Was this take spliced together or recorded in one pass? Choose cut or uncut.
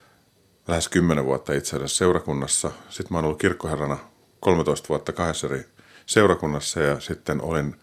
uncut